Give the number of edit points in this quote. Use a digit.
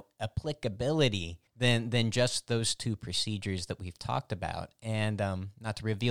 1